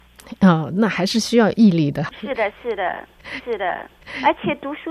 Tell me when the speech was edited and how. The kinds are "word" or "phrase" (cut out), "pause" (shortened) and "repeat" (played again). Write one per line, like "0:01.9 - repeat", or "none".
0:03.4 - repeat